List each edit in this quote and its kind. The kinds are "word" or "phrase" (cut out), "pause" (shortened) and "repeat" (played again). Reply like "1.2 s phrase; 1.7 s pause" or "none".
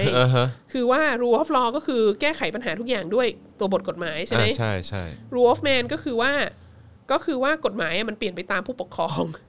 3.5 s pause; 7.0 s pause

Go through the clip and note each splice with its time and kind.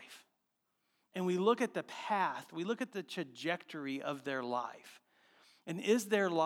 none

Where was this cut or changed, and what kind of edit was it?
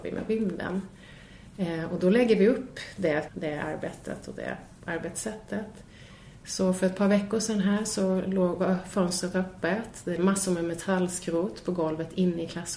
3.3 s phrase; 10.2 s word

